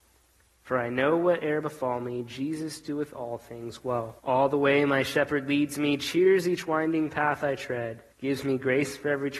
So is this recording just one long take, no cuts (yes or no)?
no